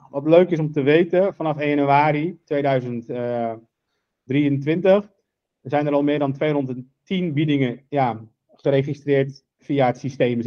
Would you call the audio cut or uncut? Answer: cut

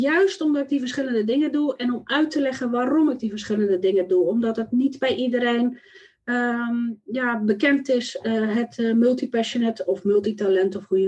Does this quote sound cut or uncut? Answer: uncut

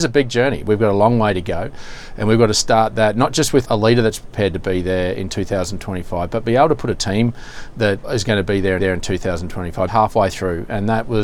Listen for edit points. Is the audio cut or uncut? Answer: cut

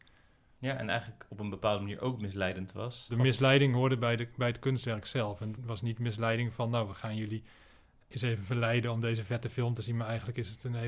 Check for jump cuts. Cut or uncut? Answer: cut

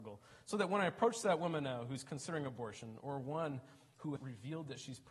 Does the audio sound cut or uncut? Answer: cut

